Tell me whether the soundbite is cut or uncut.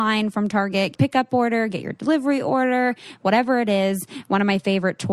cut